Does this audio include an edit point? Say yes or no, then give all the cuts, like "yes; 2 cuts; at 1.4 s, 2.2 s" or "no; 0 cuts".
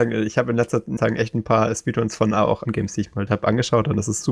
yes; 3 cuts; at 1.0 s, 2.6 s, 3.3 s